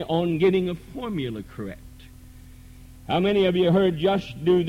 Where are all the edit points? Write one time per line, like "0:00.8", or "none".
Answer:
none